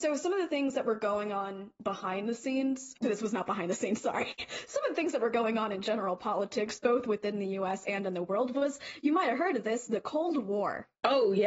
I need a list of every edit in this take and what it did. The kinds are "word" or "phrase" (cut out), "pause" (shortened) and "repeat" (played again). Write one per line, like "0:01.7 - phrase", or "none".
0:03.0 - word